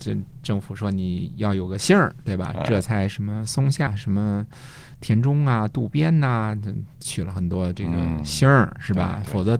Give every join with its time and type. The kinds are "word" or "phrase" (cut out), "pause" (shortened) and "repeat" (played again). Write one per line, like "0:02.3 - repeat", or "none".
0:03.9 - word